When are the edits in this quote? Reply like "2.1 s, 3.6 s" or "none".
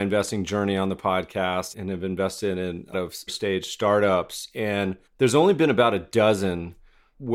1.7 s, 2.9 s, 3.3 s, 5.1 s

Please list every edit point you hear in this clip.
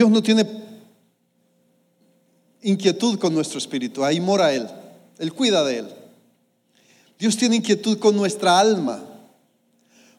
none

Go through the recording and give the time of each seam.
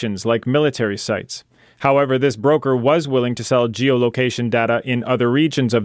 none

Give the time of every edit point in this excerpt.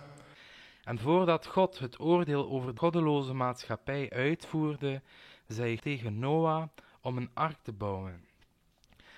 2.8 s, 5.8 s

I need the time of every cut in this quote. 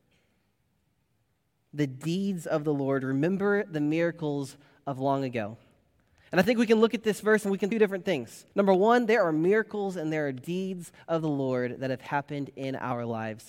7.7 s, 8.5 s

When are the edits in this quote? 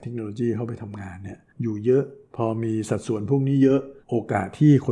1.5 s, 4.0 s

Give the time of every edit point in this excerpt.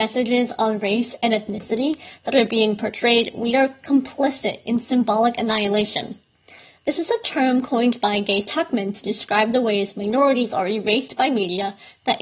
none

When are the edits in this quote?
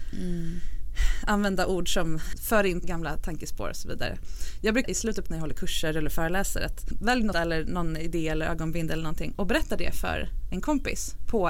2.8 s, 4.8 s, 5.3 s, 7.3 s

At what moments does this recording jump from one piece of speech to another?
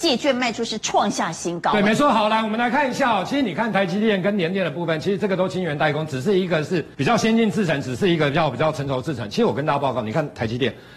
6.9 s

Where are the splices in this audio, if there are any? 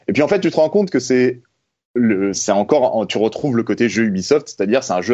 none

